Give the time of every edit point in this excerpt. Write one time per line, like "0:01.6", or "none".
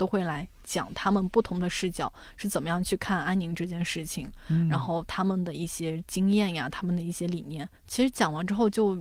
0:07.8